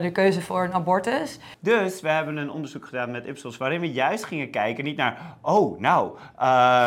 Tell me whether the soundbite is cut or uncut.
uncut